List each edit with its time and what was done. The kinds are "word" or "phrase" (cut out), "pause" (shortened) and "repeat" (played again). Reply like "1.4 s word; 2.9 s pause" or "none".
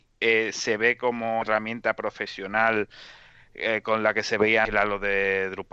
1.4 s word; 4.6 s word